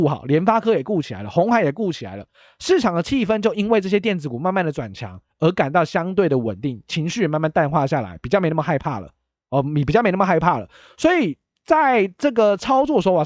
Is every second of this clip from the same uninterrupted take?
yes; 0 cuts

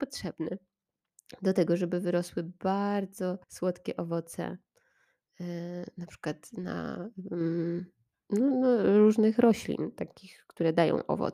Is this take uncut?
no; 1 cut; at 3.4 s

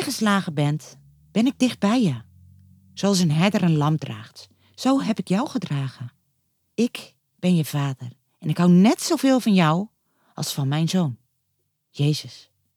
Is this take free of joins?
yes; 0 cuts

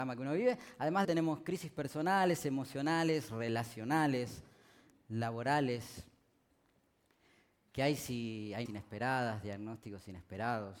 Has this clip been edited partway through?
yes; 2 cuts; at 1.0 s, 8.7 s

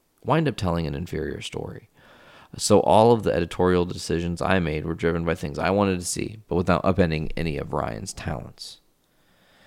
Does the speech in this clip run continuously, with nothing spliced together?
yes; 0 cuts

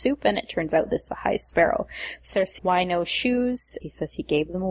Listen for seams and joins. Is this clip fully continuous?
no; 3 cuts; at 1.1 s, 2.6 s, 3.8 s

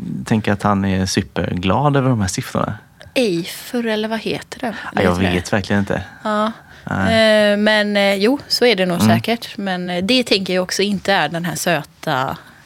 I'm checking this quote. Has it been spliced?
no; 0 cuts

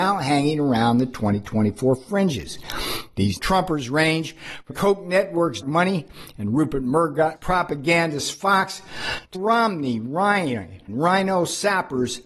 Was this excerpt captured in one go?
no; 6 cuts; at 3.4 s, 4.7 s, 5.6 s, 7.4 s, 9.3 s, 10.9 s

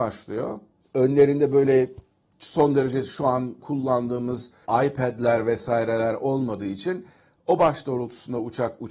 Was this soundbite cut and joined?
no; 0 cuts

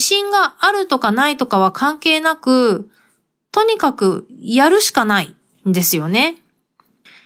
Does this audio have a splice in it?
no; 0 cuts

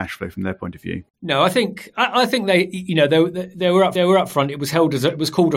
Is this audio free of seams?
no; 2 cuts; at 1.1 s, 4.0 s

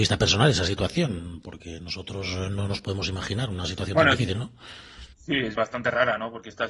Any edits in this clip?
yes; 2 cuts; at 5.1 s, 5.6 s

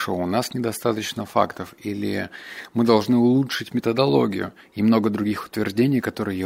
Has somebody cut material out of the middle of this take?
no; 0 cuts

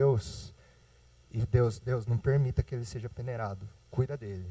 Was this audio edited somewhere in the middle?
no; 0 cuts

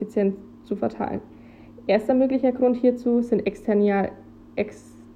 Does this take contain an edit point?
no; 0 cuts

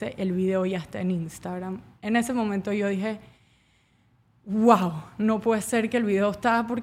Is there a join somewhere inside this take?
no; 0 cuts

